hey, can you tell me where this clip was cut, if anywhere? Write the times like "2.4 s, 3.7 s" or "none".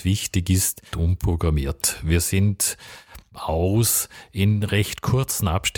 0.9 s, 3.3 s